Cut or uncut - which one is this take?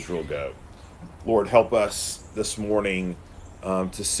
uncut